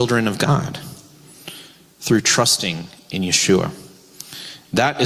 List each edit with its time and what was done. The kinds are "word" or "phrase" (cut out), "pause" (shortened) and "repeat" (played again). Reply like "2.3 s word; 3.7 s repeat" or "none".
none